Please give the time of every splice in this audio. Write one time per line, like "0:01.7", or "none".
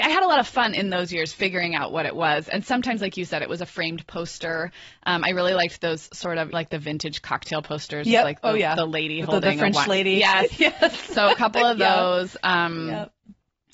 0:06.5